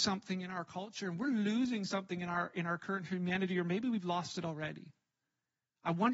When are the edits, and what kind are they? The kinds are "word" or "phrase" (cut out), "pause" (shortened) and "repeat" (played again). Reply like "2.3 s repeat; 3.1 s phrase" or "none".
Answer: none